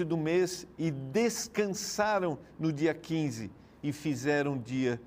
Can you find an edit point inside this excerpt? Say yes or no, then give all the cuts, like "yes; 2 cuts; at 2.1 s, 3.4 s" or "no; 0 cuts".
no; 0 cuts